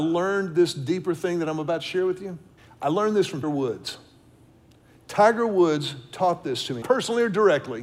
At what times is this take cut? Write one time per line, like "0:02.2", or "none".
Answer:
0:02.6
0:03.4
0:06.8

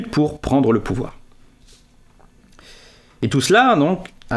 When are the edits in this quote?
none

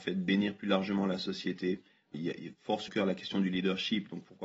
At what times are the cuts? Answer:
0:02.1
0:02.9

